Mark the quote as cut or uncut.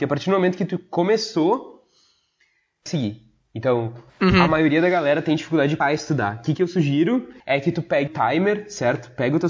cut